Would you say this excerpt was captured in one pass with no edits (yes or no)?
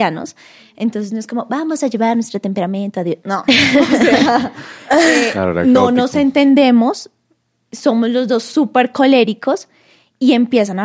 yes